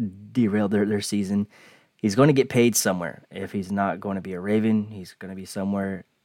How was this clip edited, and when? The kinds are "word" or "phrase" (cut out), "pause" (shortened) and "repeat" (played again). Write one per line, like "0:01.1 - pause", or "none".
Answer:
none

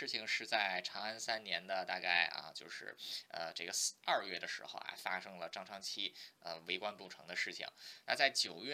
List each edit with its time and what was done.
none

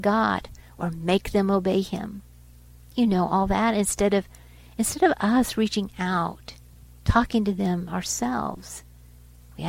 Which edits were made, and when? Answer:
none

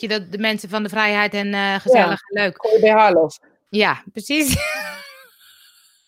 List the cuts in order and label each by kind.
none

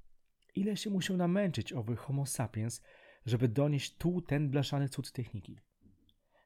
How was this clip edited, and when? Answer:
none

